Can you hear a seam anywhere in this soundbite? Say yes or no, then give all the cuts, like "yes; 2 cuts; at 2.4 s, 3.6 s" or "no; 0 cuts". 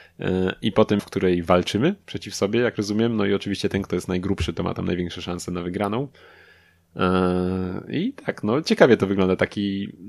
yes; 1 cut; at 1.0 s